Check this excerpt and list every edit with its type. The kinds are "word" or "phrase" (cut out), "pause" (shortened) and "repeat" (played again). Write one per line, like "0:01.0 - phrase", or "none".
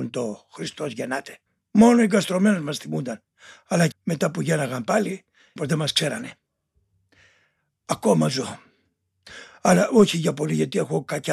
0:01.5 - pause
0:03.9 - word
0:05.6 - word